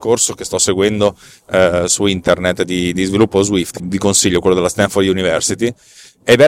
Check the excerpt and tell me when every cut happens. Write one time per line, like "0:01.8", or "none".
0:03.8